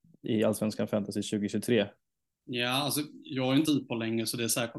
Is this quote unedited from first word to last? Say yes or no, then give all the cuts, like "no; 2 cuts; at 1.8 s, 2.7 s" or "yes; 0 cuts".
no; 1 cut; at 3.7 s